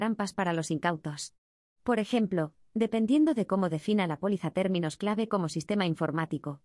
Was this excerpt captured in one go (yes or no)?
yes